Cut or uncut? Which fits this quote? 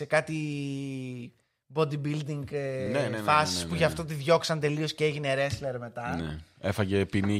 uncut